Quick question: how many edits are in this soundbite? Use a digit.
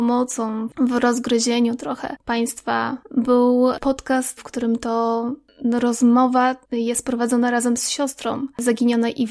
4